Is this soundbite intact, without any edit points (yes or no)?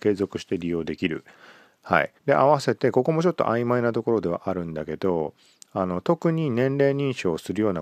no